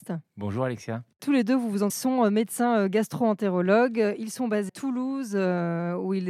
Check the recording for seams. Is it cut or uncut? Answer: cut